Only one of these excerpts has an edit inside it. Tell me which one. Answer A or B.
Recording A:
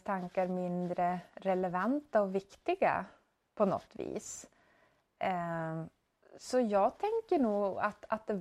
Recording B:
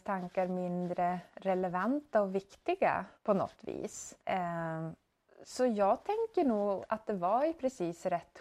B